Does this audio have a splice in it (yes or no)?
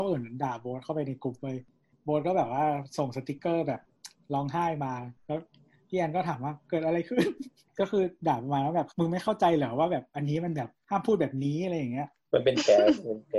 no